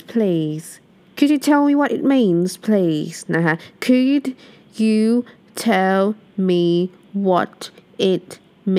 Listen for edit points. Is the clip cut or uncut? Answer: uncut